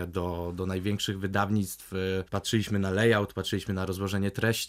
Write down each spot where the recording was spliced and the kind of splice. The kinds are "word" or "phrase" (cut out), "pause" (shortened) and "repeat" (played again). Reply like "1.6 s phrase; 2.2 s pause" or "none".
2.3 s pause